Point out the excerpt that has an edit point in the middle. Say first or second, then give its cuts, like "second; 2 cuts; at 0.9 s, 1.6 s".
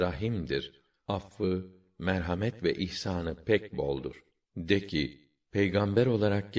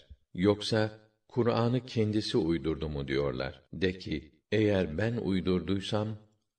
second; 2 cuts; at 3.7 s, 4.4 s